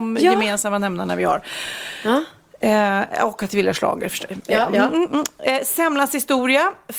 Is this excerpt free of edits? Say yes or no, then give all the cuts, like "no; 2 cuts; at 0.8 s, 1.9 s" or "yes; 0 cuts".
yes; 0 cuts